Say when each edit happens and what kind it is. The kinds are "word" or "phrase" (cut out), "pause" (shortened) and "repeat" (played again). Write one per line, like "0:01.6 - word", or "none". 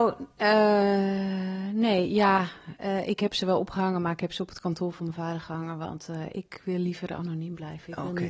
none